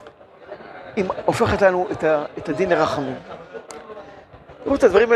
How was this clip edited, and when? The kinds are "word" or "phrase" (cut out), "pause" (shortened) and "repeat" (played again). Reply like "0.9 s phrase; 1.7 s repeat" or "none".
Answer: none

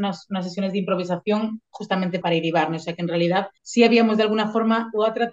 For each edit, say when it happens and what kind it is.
2.2 s word; 3.6 s pause

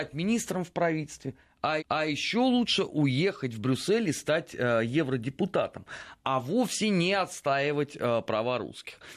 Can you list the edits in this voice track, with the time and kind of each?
1.8 s repeat

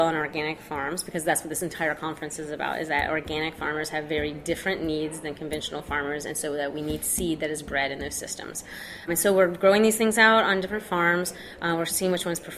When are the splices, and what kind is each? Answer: 9.1 s word

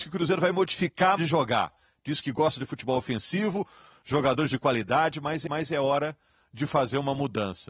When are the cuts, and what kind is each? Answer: 1.2 s word; 5.5 s repeat

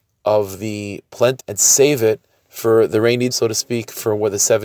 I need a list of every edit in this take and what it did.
1.4 s word; 3.3 s phrase

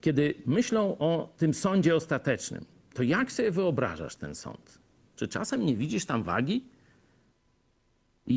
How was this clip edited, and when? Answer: none

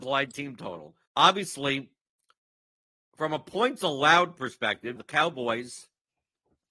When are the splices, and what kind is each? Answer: 1.1 s pause; 5.0 s word

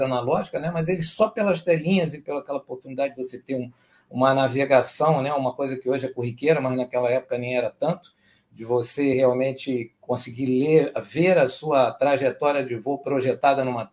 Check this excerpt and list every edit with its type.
none

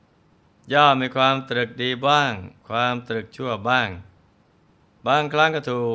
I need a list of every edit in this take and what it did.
2.6 s pause

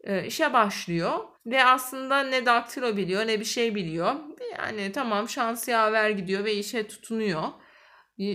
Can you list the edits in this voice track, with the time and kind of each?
1.3 s pause

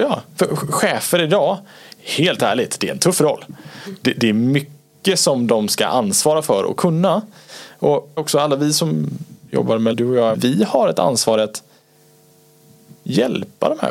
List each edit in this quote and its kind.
8.2 s phrase; 9.9 s word; 10.3 s word

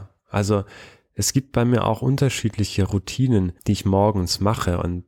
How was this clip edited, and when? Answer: 3.6 s pause

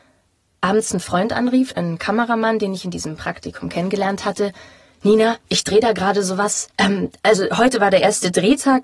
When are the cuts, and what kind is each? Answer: 5.4 s pause; 6.7 s pause

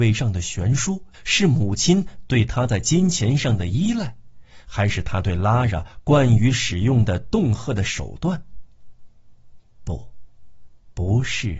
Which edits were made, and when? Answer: 1.1 s pause

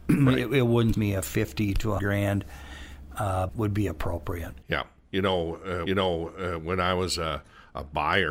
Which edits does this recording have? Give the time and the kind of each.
0.9 s word; 2.0 s word; 3.5 s word; 5.9 s repeat

